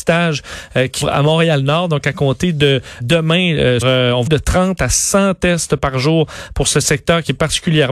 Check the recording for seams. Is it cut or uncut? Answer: cut